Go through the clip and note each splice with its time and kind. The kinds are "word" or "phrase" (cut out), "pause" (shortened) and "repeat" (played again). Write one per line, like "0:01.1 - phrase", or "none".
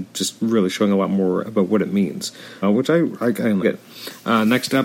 0:02.6 - word
0:03.6 - phrase